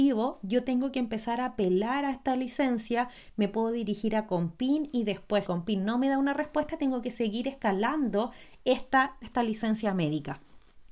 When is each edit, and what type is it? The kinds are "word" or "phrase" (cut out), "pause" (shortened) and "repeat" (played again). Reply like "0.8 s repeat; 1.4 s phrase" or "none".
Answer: 5.4 s word; 9.2 s phrase